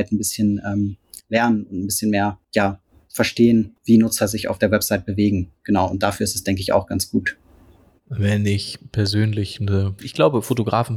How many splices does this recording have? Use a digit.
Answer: 3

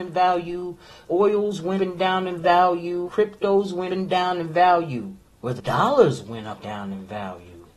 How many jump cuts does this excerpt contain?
6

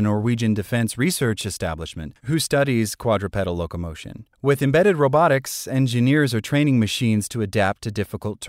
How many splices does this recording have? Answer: 2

